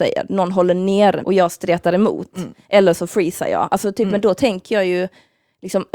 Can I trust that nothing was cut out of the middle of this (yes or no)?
no